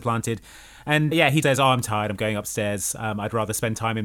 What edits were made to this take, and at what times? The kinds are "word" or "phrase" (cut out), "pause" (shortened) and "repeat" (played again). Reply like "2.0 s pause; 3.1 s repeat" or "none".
1.1 s word; 1.4 s word